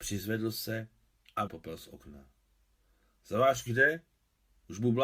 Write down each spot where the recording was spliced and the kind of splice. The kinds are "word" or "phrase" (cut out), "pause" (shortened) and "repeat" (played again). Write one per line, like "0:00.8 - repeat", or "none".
0:01.5 - word
0:03.7 - word

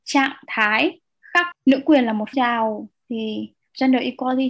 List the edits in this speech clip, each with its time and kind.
0:01.5 - word
0:02.3 - word

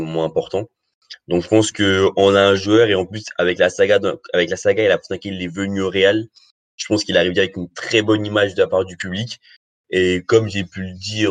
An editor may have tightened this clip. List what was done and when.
none

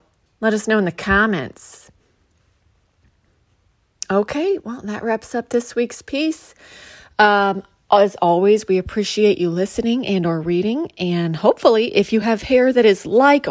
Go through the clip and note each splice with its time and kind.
none

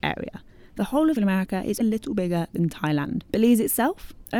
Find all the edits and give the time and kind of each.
0:01.2 - word
0:01.8 - word
0:03.2 - pause

